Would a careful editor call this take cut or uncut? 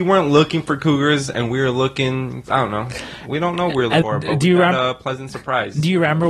cut